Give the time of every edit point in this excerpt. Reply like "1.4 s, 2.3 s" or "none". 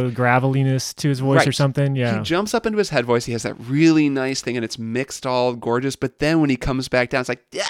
none